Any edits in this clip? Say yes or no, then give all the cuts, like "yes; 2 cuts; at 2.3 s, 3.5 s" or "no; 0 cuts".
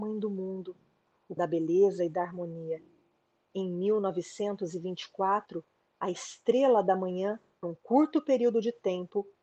yes; 2 cuts; at 1.4 s, 7.6 s